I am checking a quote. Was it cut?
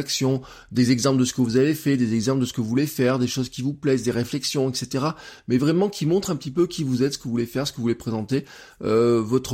no; 0 cuts

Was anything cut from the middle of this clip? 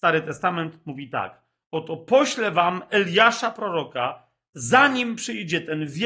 no; 0 cuts

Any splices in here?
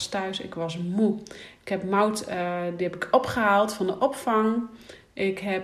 no; 0 cuts

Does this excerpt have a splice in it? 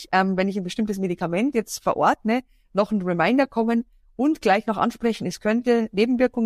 no; 0 cuts

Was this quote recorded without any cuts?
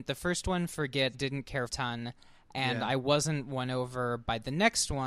no; 2 cuts; at 1.1 s, 1.7 s

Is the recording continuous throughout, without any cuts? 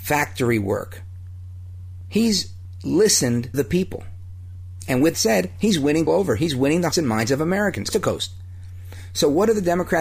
no; 5 cuts; at 3.5 s, 5.1 s, 6.1 s, 6.9 s, 7.9 s

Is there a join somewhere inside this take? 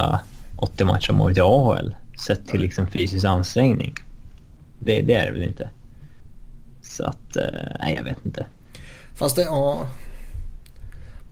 no; 0 cuts

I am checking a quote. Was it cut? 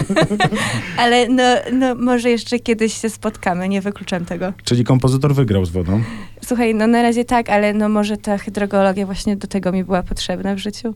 no; 0 cuts

